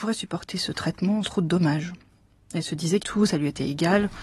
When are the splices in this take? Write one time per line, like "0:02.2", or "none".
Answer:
0:01.2
0:03.0